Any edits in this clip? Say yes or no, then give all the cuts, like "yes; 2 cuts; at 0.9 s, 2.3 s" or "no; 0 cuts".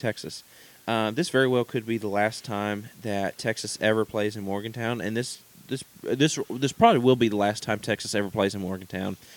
no; 0 cuts